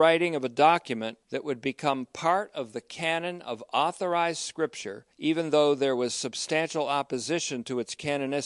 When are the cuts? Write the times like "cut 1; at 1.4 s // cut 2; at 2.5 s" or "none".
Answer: cut 1; at 1.2 s // cut 2; at 5.1 s